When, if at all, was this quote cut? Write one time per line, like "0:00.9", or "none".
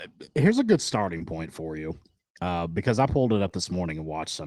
none